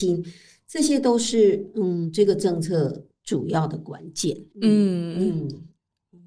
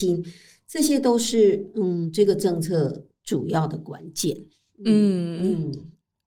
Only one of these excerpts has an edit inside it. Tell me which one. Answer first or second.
first